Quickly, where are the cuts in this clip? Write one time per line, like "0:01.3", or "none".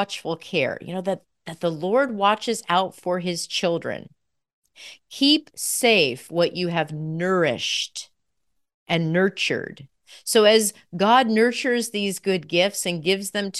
none

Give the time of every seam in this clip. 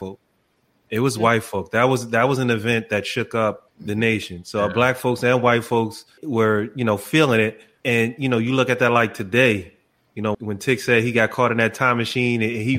0:10.3

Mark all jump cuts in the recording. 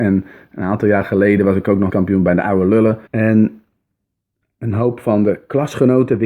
0:01.9
0:03.1

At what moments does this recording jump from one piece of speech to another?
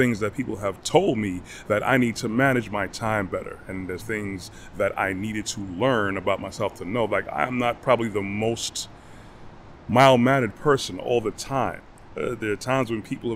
0:04.0

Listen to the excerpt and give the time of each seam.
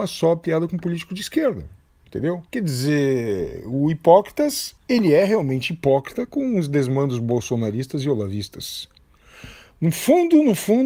0:02.5
0:04.8

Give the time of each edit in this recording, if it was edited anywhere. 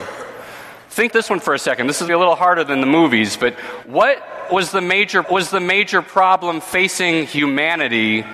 0:01.1
0:02.1
0:05.2

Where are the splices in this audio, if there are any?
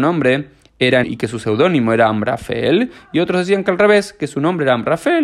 0:01.0

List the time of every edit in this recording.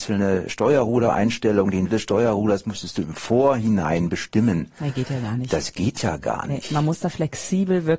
0:01.9

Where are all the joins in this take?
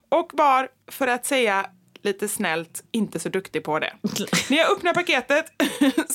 none

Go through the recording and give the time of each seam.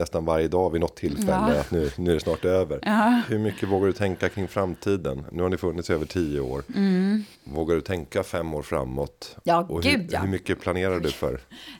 0:07.3

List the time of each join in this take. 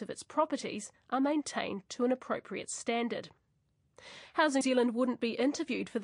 0:04.6

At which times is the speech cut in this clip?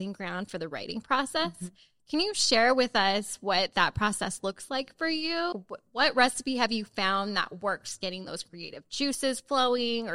0:05.5

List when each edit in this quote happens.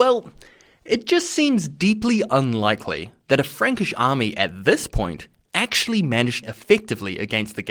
0:06.4

